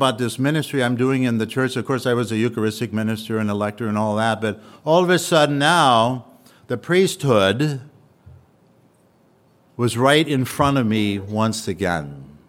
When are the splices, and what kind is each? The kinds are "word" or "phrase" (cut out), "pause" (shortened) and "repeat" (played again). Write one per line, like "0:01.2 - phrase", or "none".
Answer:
none